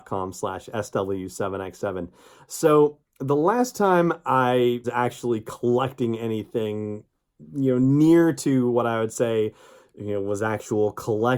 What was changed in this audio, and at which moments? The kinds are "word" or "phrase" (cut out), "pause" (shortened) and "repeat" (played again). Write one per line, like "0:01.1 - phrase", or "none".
0:04.8 - word